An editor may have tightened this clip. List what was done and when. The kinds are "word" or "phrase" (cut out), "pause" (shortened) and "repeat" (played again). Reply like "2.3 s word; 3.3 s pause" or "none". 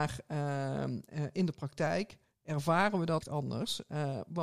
3.2 s word